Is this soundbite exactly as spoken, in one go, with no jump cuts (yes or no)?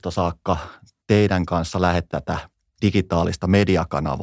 no